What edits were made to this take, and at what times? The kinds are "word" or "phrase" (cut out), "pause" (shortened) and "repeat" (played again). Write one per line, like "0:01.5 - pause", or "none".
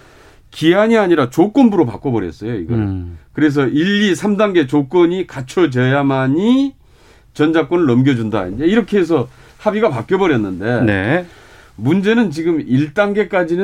none